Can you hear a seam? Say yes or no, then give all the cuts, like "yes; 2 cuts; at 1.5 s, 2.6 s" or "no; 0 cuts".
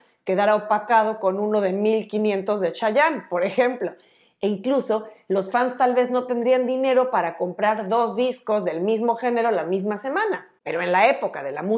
no; 0 cuts